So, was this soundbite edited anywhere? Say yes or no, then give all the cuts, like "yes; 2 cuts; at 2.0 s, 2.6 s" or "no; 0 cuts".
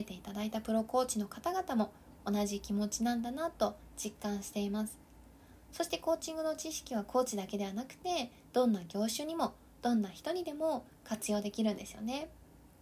no; 0 cuts